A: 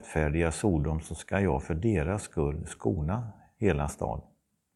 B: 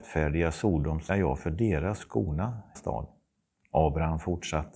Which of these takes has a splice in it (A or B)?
B